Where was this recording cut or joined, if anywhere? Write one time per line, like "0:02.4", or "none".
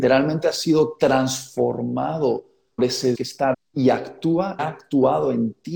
0:02.8
0:03.1
0:03.5
0:04.6